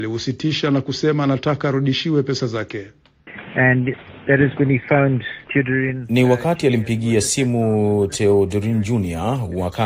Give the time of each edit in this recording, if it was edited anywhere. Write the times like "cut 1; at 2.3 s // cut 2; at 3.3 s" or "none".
none